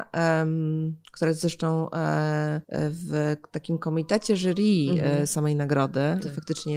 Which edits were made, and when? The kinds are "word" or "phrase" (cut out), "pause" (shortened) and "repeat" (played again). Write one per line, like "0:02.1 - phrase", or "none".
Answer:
0:01.0 - pause
0:02.6 - pause